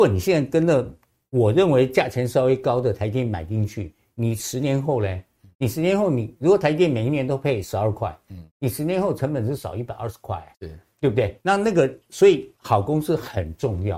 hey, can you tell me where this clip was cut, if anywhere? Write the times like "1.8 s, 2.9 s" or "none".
10.5 s, 11.4 s, 12.0 s, 12.6 s

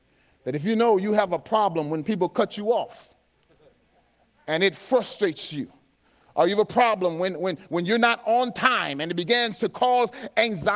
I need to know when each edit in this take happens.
none

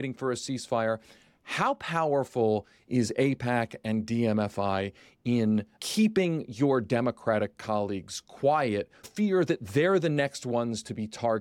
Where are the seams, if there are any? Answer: 5.8 s, 9.0 s

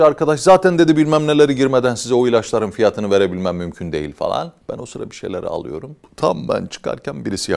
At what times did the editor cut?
4.6 s

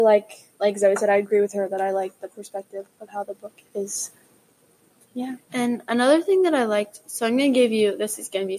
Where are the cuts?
3.7 s, 5.4 s

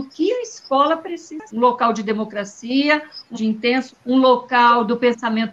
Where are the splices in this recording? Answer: 1.5 s, 3.3 s, 3.9 s

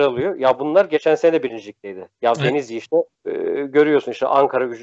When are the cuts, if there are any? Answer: 3.1 s

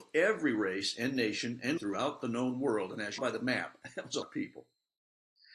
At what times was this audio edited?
1.8 s, 3.2 s, 4.2 s

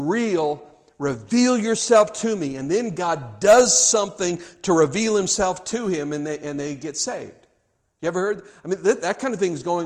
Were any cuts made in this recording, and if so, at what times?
none

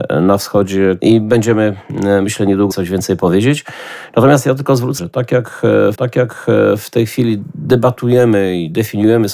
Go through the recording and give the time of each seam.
1.0 s, 2.7 s, 5.0 s, 5.9 s

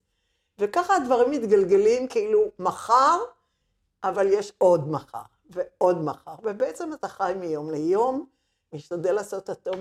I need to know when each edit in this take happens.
none

